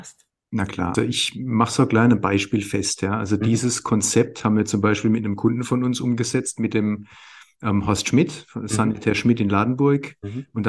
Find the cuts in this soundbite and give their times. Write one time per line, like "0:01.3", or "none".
0:00.9